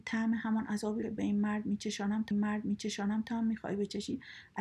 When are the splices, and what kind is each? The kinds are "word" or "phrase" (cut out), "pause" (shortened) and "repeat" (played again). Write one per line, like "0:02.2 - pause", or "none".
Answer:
0:01.0 - phrase
0:02.3 - repeat